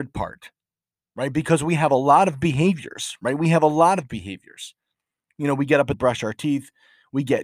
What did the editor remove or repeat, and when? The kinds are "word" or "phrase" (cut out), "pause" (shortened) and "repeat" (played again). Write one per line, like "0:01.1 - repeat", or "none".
0:05.9 - phrase